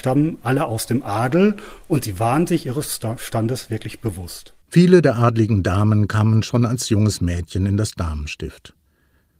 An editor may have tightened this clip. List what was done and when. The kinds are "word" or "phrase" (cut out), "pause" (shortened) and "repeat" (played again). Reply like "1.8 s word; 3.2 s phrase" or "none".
4.6 s pause